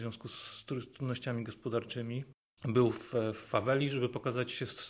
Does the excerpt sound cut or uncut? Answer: uncut